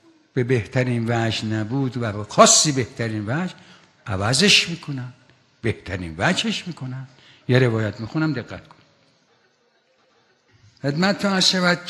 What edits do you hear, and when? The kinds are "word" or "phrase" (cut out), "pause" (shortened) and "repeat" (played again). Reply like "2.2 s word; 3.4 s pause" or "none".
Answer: none